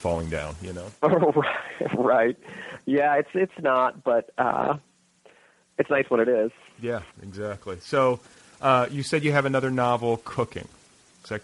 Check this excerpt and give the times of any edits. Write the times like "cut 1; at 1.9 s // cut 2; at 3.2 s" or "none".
none